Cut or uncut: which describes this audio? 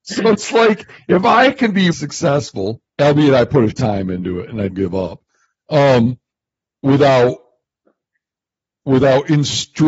cut